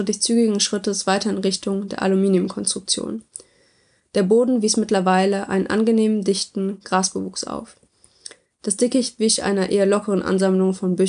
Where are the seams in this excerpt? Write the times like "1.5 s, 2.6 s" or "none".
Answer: none